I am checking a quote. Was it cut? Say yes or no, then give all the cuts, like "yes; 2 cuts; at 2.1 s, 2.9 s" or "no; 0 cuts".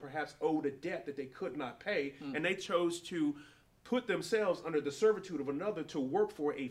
no; 0 cuts